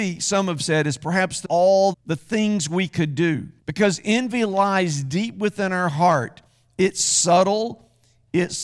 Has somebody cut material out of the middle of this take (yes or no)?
yes